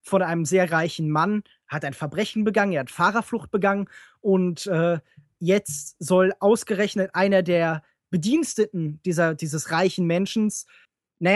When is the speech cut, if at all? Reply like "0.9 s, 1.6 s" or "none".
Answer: none